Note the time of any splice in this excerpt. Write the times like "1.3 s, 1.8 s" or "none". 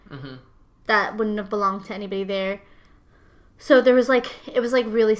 none